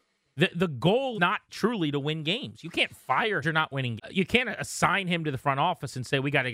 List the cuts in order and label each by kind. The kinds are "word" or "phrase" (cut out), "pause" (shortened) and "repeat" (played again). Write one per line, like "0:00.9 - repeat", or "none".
0:01.1 - word
0:01.5 - word
0:03.4 - phrase
0:04.0 - word